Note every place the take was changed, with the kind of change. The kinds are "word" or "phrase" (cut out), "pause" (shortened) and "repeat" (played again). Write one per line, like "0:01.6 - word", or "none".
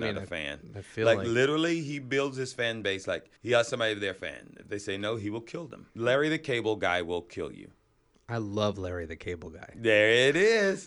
0:03.4 - pause
0:05.9 - pause
0:08.1 - pause